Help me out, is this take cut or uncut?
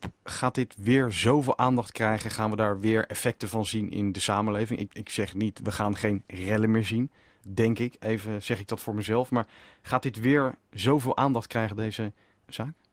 cut